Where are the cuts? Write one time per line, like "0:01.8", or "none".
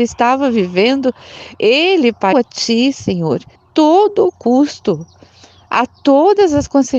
0:01.6
0:02.3
0:03.6